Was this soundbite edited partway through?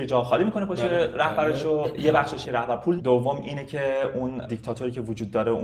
yes; 2 cuts; at 2.4 s, 3.0 s

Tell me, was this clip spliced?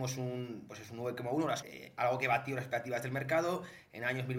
yes; 1 cut; at 1.6 s

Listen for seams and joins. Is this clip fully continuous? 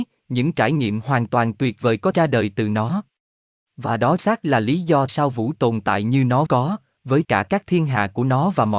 no; 6 cuts; at 2.1 s, 4.2 s, 5.1 s, 5.5 s, 6.5 s, 7.2 s

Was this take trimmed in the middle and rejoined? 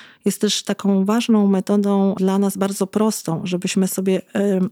yes; 1 cut; at 2.2 s

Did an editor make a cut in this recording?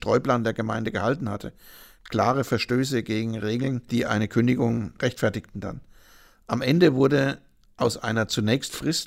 no; 0 cuts

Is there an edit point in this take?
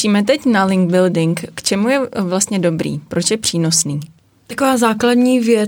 no; 0 cuts

